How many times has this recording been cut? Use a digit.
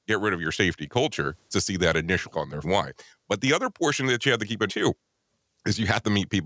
4